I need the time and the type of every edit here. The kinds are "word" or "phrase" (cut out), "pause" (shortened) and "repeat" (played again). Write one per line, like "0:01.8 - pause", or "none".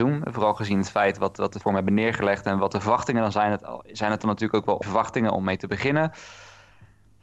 0:01.6 - word
0:04.8 - word